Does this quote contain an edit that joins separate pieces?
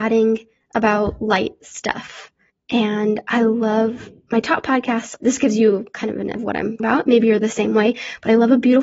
yes; 4 cuts; at 2.5 s, 5.2 s, 6.3 s, 6.8 s

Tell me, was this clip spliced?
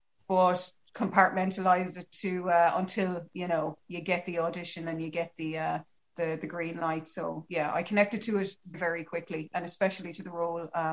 yes; 2 cuts; at 6.0 s, 8.7 s

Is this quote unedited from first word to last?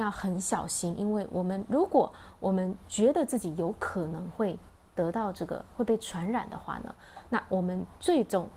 yes; 0 cuts

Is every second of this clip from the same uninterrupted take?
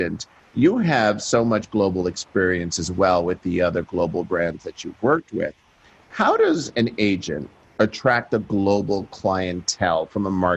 yes; 0 cuts

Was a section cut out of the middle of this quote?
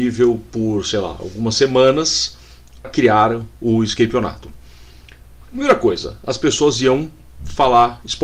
yes; 1 cut; at 2.8 s

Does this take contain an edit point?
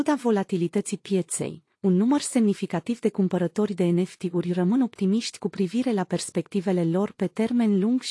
no; 0 cuts

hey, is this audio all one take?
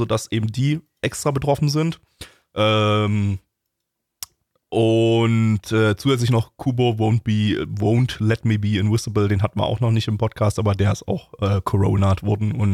yes; 0 cuts

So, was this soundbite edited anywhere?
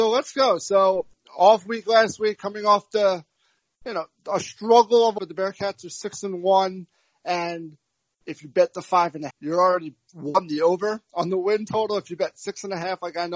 yes; 2 cuts; at 5.2 s, 9.3 s

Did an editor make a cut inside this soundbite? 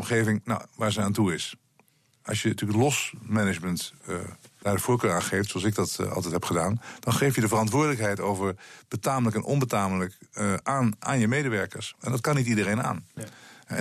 no; 0 cuts

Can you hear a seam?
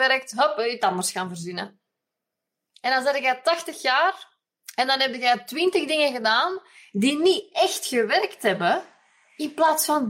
no; 0 cuts

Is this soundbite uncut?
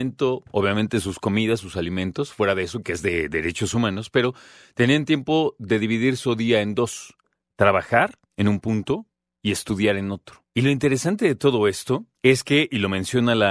no; 3 cuts; at 8.2 s, 10.5 s, 12.1 s

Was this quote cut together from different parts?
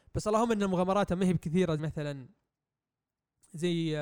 yes; 1 cut; at 1.8 s

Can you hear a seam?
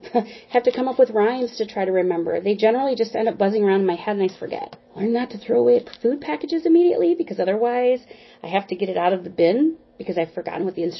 yes; 2 cuts; at 4.3 s, 4.8 s

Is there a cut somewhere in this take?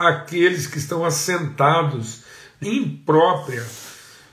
yes; 1 cut; at 2.6 s

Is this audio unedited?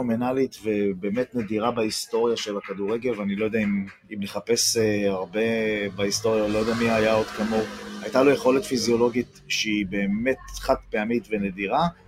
no; 1 cut; at 4.0 s

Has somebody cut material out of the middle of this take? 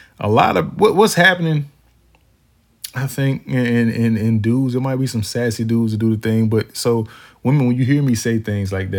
no; 0 cuts

